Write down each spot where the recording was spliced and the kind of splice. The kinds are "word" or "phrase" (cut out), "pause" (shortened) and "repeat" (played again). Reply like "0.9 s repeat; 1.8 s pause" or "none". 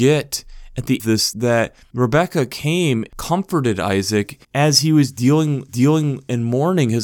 1.0 s phrase; 1.3 s word; 3.1 s word; 4.4 s pause; 5.7 s repeat